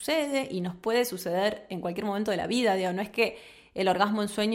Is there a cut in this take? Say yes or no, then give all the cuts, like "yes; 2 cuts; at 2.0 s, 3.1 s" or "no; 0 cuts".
no; 0 cuts